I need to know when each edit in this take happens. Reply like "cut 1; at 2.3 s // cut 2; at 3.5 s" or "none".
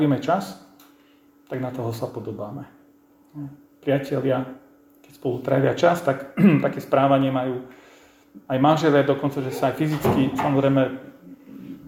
none